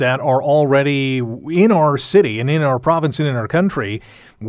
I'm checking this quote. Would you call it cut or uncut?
uncut